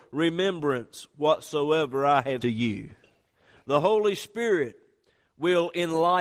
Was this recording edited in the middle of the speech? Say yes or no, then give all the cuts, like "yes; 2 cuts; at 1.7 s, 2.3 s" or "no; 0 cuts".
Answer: yes; 1 cut; at 2.4 s